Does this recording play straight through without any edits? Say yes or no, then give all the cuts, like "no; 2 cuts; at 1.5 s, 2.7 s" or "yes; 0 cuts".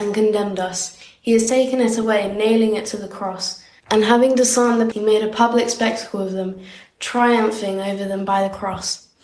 no; 1 cut; at 4.9 s